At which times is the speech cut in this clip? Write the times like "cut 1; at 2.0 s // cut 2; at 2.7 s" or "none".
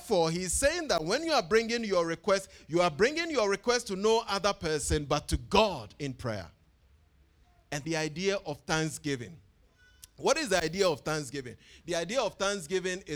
cut 1; at 7.8 s